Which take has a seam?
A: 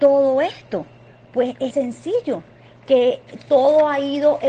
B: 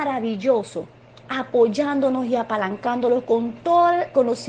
A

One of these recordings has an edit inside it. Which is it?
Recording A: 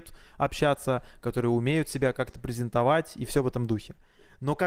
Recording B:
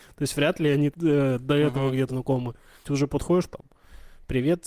B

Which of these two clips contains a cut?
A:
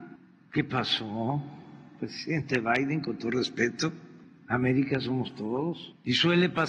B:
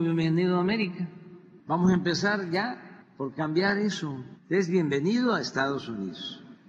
B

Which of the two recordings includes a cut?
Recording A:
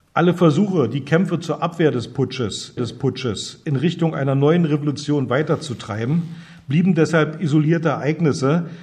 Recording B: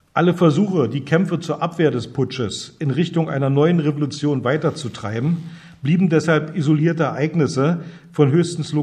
A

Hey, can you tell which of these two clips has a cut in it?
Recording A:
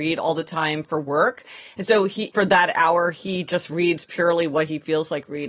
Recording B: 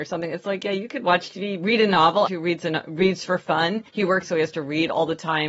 B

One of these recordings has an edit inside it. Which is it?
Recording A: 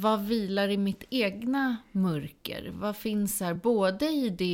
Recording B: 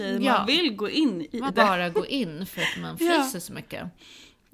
B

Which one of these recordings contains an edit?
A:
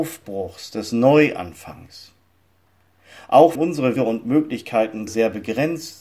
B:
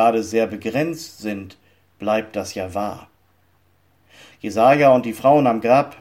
A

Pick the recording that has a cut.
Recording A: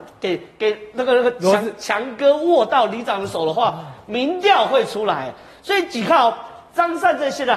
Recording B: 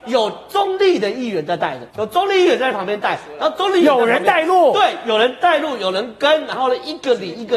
B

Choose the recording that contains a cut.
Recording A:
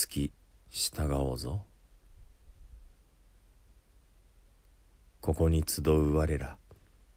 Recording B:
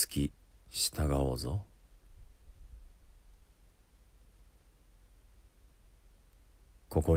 A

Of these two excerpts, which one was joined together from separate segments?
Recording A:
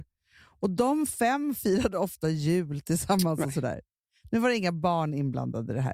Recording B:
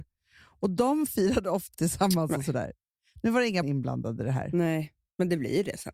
B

